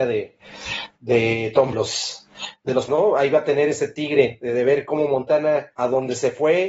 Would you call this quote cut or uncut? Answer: cut